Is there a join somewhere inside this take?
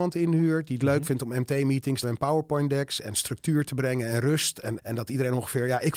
yes; 2 cuts; at 2.0 s, 4.8 s

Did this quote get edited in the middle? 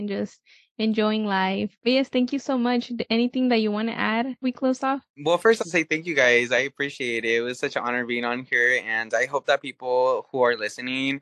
yes; 2 cuts; at 4.4 s, 5.6 s

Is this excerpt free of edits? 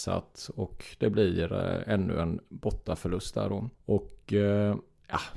no; 1 cut; at 3.7 s

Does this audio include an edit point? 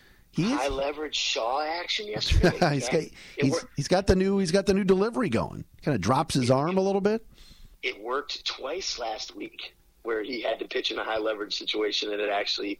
yes; 2 cuts; at 5.7 s, 7.7 s

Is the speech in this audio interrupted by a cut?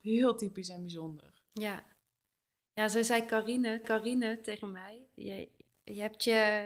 yes; 2 cuts; at 3.8 s, 5.7 s

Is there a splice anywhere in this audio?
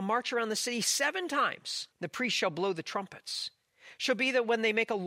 yes; 1 cut; at 1.9 s

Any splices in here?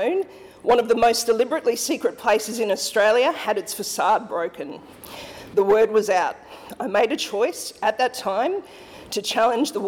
no; 0 cuts

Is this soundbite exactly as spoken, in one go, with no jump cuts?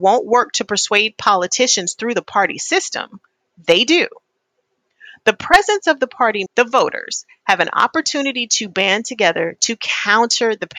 no; 1 cut; at 6.5 s

